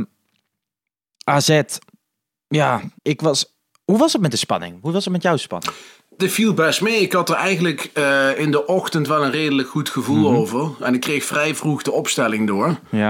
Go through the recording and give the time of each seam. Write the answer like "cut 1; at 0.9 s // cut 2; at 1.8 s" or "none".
cut 1; at 3.0 s